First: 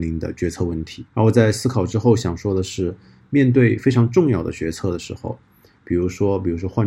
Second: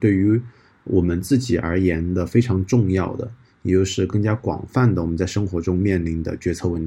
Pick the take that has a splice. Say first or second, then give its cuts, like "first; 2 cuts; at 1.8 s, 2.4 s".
first; 1 cut; at 1.1 s